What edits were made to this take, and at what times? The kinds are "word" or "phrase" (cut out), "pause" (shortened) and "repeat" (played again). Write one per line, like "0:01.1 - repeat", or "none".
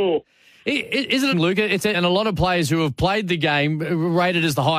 0:01.3 - word
0:01.9 - phrase